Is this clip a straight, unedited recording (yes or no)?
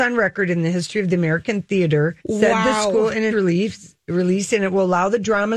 no